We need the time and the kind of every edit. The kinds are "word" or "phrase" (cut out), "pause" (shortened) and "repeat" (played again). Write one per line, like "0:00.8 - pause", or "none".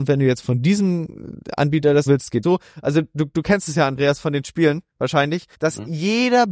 0:02.1 - word
0:02.4 - word
0:05.5 - pause

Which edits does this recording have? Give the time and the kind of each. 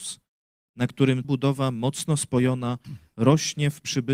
0:01.2 - word

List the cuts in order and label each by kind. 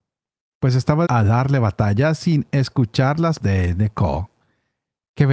0:01.1 - word
0:03.4 - word

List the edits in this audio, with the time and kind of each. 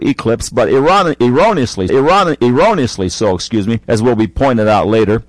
0:01.9 - repeat
0:03.8 - pause

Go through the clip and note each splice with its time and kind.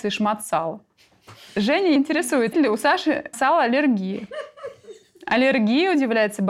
0:02.0 - word
0:02.5 - word
0:03.3 - word

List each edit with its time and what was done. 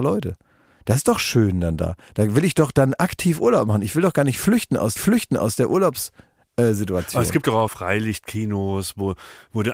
0:05.0 - repeat
0:07.7 - word

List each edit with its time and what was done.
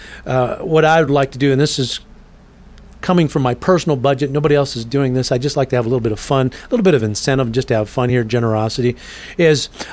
none

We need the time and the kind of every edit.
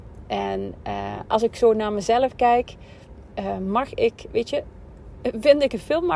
none

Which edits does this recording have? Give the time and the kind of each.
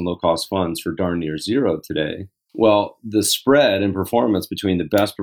none

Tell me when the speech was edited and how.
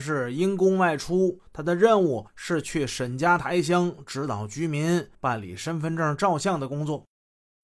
0:01.5 - pause
0:02.3 - pause
0:05.1 - pause

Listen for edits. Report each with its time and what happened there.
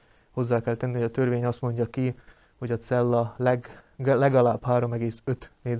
none

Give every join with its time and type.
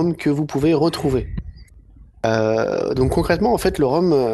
0:02.1 - pause

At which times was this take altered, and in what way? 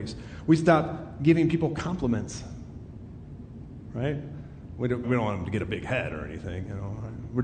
0:05.0 - word

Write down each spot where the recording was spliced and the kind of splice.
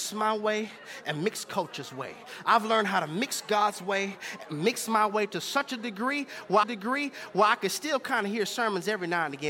0:06.6 - repeat

